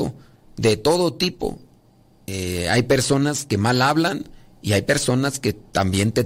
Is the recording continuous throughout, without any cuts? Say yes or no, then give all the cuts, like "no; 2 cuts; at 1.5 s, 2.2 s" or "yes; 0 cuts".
yes; 0 cuts